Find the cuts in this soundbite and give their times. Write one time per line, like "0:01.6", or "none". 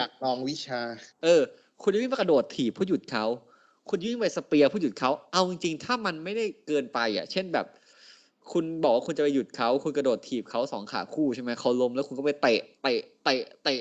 0:01.1